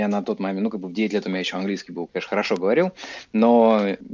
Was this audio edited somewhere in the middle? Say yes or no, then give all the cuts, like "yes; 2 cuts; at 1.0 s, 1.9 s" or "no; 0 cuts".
no; 0 cuts